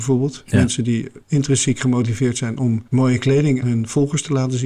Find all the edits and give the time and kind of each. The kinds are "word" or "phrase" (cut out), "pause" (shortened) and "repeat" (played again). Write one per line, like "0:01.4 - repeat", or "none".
0:01.2 - pause
0:02.9 - pause
0:03.6 - word